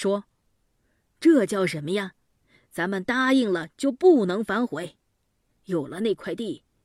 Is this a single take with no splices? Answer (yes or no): yes